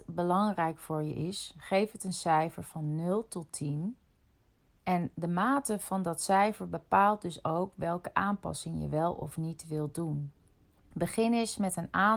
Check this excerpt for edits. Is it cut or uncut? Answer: uncut